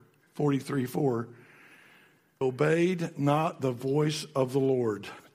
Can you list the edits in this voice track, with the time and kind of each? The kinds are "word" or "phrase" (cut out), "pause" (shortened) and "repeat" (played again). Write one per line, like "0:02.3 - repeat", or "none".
0:02.4 - word